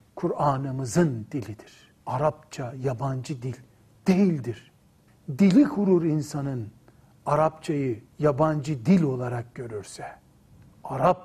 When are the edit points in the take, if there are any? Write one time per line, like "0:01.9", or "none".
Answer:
0:02.0
0:05.1
0:08.1